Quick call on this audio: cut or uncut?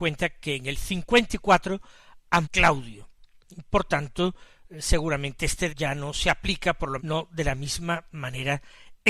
cut